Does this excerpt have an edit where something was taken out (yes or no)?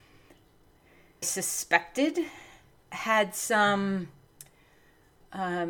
yes